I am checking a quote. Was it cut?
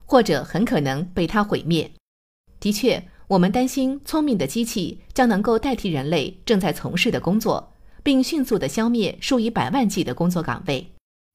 no; 0 cuts

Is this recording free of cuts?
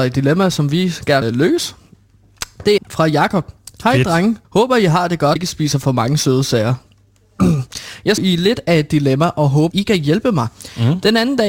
no; 6 cuts; at 1.2 s, 2.8 s, 4.4 s, 5.4 s, 8.2 s, 9.7 s

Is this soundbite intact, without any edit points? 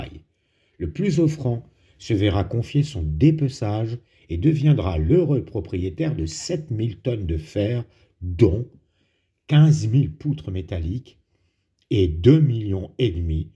yes; 0 cuts

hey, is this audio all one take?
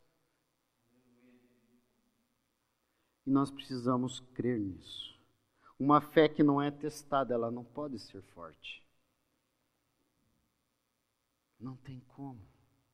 yes; 0 cuts

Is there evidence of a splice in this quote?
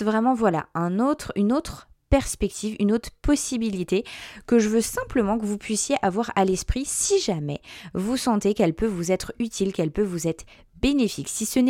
no; 0 cuts

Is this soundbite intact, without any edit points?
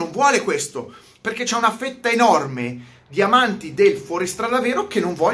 yes; 0 cuts

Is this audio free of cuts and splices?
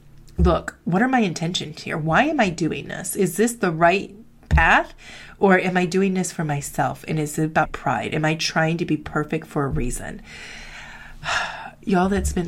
no; 1 cut; at 7.7 s

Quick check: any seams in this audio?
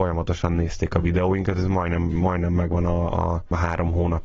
no; 0 cuts

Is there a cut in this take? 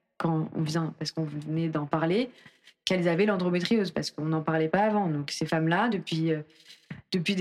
no; 0 cuts

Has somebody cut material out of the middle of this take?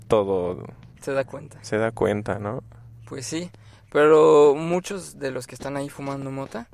yes; 1 cut; at 1.0 s

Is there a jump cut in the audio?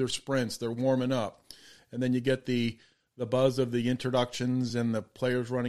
no; 0 cuts

